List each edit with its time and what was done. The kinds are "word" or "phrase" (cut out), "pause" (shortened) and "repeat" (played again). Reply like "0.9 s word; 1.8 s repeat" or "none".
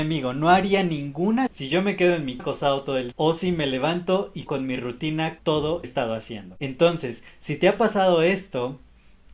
1.5 s word; 2.4 s word; 3.1 s word; 4.5 s word; 5.4 s word; 5.8 s phrase